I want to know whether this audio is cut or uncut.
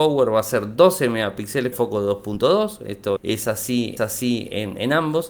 cut